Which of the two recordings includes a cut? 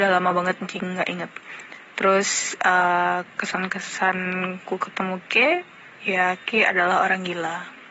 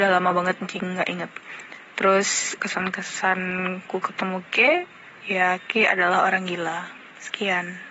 second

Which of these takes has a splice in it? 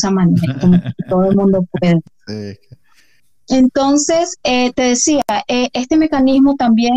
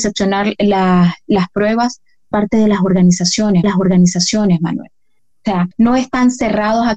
second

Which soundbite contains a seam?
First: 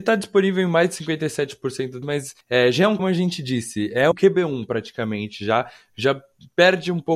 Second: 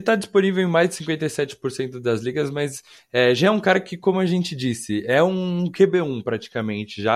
first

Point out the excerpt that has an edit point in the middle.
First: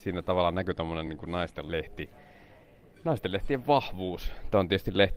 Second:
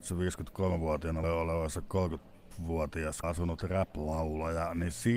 second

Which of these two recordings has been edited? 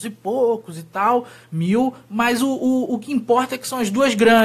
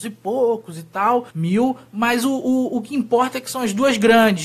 second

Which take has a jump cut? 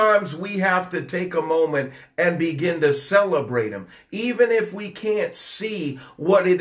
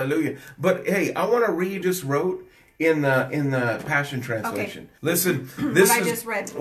second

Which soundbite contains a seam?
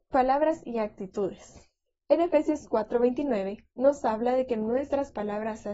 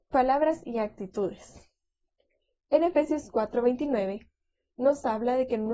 first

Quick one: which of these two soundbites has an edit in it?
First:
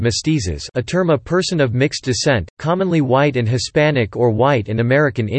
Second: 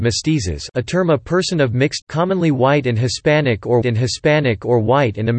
second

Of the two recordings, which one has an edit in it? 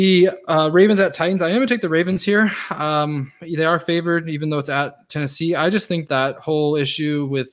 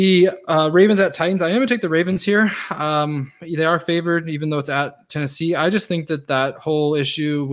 first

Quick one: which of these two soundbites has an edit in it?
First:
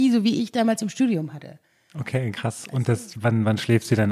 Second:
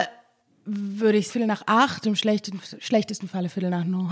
second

